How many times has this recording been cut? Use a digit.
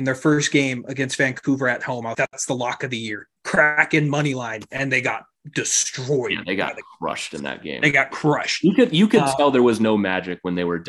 2